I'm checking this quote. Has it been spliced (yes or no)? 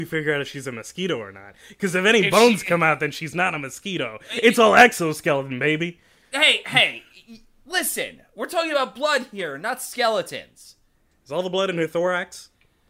no